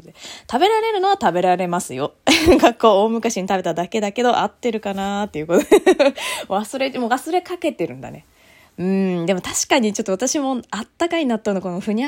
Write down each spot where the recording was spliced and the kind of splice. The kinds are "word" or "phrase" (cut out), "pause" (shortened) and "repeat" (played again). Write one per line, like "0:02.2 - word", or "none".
none